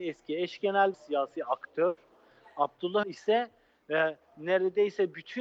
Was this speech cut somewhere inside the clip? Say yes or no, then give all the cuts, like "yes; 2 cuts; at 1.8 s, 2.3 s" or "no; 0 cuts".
yes; 2 cuts; at 0.9 s, 3.0 s